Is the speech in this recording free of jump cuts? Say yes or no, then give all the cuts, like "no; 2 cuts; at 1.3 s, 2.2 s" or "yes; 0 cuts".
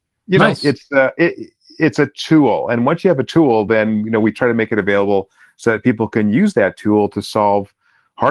yes; 0 cuts